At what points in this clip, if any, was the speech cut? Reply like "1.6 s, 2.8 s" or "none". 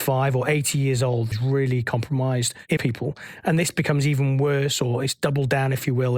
1.3 s, 2.8 s